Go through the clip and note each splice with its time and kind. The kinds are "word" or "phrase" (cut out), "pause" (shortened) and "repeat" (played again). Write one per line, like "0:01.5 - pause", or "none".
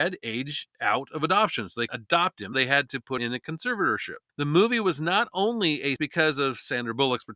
0:01.9 - word
0:02.5 - word
0:03.2 - word
0:04.3 - pause
0:06.0 - word